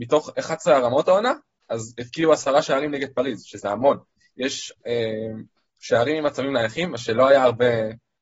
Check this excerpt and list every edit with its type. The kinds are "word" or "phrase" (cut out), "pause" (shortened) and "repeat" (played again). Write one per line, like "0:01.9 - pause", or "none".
0:04.8 - word